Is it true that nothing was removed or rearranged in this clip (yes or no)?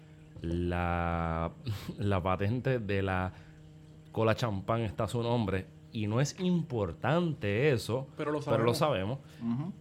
yes